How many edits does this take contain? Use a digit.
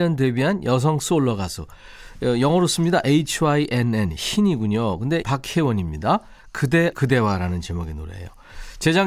2